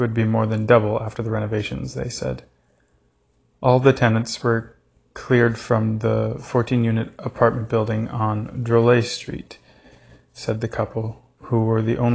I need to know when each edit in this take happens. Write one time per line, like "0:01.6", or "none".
none